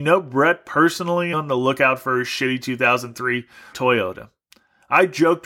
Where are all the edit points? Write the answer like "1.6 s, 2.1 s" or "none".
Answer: 1.3 s, 3.7 s